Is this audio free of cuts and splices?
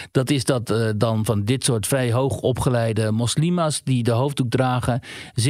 yes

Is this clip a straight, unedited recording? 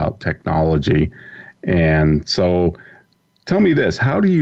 yes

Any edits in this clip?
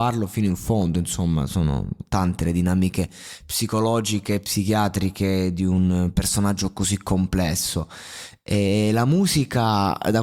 no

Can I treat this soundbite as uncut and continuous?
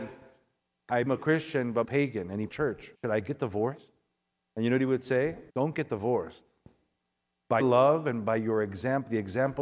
no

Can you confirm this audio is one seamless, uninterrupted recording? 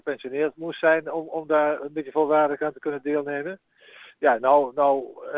yes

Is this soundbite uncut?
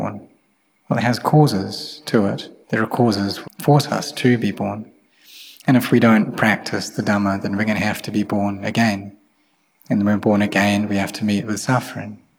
no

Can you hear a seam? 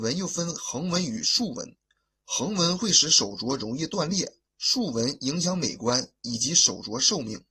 yes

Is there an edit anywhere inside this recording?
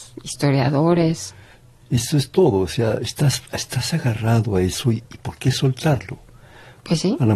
no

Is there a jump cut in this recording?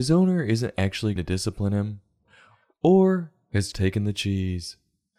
yes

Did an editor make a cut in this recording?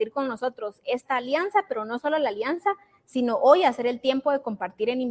no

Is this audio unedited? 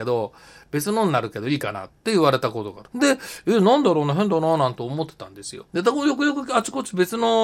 no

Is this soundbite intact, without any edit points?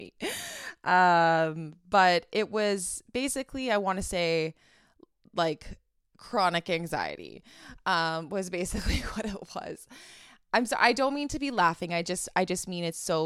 yes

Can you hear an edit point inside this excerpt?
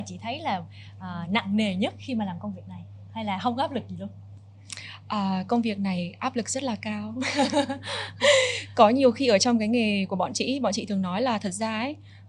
no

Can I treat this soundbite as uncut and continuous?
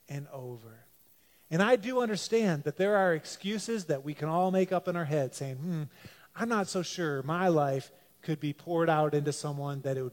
yes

